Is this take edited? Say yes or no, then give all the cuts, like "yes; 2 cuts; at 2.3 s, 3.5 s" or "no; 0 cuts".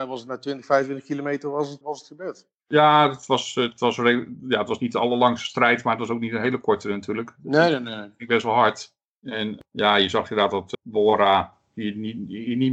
yes; 2 cuts; at 1.8 s, 10.7 s